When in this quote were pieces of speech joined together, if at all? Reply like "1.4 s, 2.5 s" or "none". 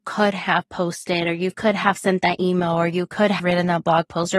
3.4 s